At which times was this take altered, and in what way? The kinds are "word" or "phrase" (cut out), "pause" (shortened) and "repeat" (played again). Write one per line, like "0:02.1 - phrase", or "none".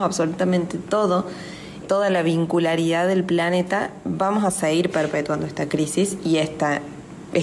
0:01.8 - word

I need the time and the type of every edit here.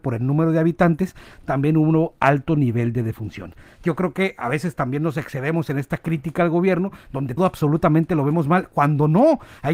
0:07.4 - word

